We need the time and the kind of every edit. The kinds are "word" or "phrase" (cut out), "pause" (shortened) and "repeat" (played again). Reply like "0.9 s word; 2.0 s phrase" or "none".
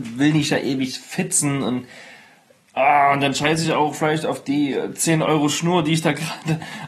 none

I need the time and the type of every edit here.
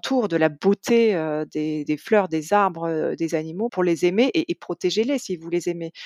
1.9 s word; 3.7 s word

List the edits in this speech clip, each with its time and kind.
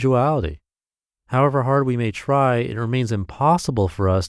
none

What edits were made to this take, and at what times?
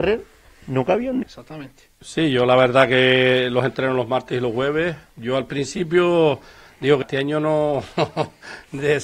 1.2 s word; 7.0 s word

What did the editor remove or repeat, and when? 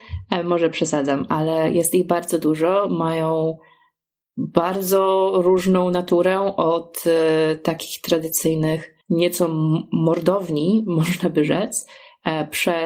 9.0 s pause

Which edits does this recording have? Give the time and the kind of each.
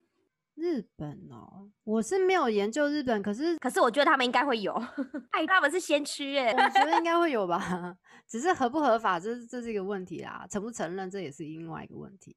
5.5 s word; 6.5 s word

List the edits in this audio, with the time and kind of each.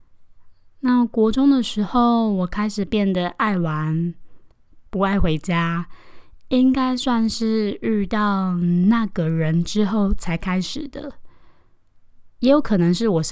4.9 s pause

